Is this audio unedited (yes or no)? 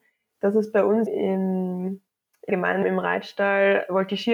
no